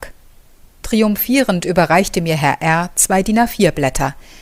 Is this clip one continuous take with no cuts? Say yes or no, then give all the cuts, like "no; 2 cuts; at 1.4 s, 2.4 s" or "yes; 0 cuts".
yes; 0 cuts